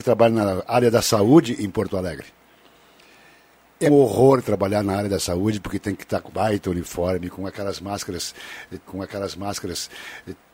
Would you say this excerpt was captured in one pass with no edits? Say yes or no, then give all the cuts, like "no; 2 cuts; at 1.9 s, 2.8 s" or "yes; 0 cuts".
no; 3 cuts; at 3.9 s, 6.3 s, 8.9 s